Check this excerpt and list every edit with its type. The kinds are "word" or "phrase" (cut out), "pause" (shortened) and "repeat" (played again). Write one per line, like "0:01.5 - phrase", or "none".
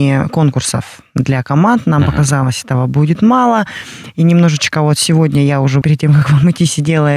0:05.8 - phrase